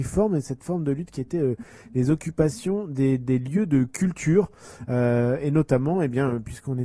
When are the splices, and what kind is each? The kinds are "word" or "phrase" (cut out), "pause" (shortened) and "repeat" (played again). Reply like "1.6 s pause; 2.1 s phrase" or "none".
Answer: none